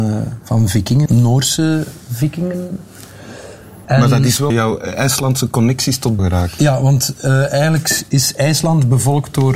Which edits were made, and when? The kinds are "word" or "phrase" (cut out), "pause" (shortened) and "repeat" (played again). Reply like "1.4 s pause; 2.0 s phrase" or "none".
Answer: 1.1 s phrase; 3.8 s pause; 4.5 s word; 6.2 s word